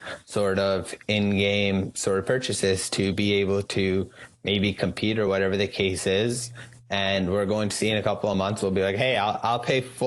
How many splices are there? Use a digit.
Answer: 0